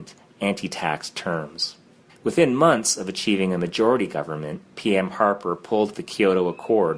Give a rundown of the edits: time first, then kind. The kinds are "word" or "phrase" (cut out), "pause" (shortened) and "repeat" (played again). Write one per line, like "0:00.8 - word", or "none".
0:02.1 - pause
0:05.9 - phrase